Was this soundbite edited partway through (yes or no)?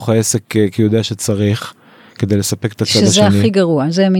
no